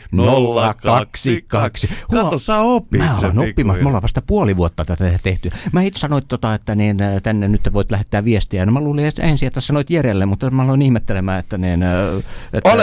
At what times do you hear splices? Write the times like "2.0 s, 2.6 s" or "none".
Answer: 6.0 s